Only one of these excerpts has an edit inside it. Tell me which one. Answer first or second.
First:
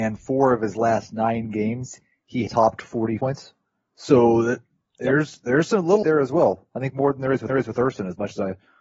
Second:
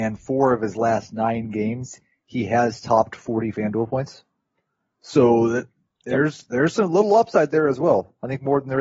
first